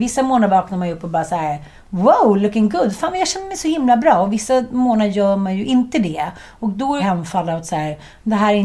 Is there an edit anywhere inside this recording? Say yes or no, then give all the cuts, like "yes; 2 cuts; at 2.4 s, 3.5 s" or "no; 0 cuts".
yes; 1 cut; at 7.0 s